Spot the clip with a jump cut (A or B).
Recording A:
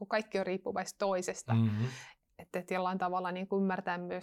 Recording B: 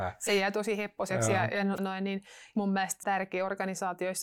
B